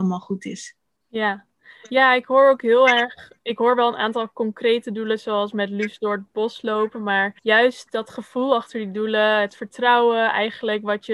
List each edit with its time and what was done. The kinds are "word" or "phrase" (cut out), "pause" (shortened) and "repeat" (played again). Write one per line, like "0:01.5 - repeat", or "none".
0:03.4 - pause
0:07.4 - pause